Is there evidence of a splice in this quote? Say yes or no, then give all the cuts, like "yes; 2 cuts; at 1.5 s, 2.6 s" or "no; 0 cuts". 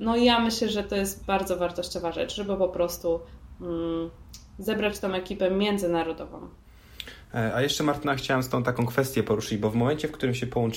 no; 0 cuts